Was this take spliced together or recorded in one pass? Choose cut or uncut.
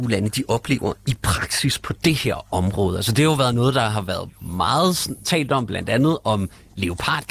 uncut